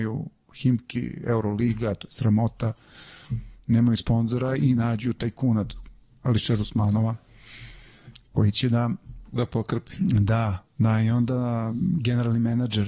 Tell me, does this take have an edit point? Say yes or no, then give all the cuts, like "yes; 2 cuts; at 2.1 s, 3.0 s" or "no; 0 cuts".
no; 0 cuts